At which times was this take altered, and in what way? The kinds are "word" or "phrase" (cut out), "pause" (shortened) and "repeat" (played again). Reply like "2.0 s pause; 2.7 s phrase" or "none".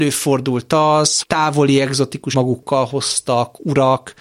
1.2 s word; 2.3 s word